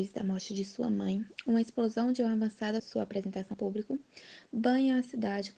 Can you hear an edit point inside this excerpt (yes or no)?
yes